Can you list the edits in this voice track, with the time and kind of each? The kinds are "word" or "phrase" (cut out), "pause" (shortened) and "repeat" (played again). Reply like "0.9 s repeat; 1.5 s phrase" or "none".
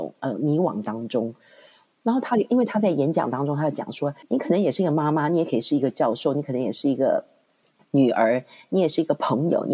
4.2 s pause